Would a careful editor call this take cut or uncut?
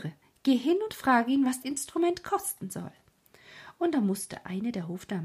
cut